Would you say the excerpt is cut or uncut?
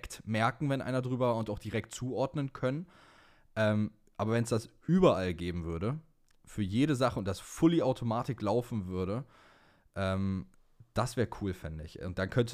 uncut